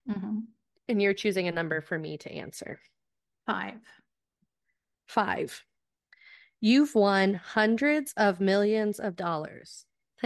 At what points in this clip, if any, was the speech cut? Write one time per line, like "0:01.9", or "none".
none